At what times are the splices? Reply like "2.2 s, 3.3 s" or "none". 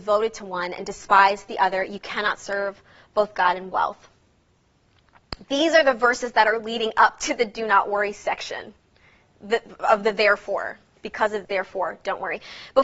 11.4 s